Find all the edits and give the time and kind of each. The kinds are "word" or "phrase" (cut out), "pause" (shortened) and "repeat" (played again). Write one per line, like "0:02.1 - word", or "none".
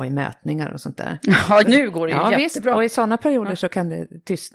0:01.6 - word